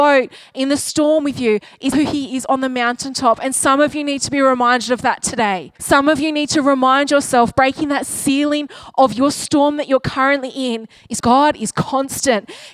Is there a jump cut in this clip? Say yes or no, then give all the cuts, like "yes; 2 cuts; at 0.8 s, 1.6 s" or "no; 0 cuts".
yes; 3 cuts; at 1.9 s, 5.8 s, 11.2 s